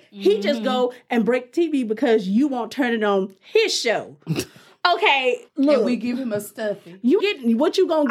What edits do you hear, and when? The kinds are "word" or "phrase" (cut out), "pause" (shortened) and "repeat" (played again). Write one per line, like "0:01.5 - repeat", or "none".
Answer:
0:05.5 - pause
0:07.2 - word